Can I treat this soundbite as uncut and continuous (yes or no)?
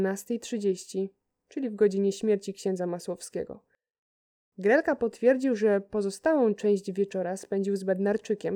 yes